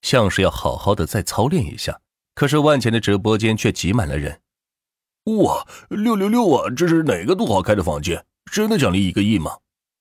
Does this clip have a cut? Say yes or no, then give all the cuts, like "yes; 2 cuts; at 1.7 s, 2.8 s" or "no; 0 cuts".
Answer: yes; 1 cut; at 2.0 s